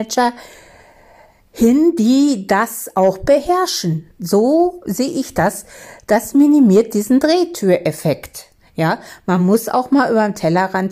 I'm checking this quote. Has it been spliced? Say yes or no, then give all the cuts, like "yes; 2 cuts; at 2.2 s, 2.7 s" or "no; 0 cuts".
no; 0 cuts